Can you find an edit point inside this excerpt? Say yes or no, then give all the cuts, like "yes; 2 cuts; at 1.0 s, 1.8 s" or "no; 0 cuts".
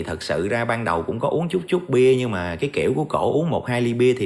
no; 0 cuts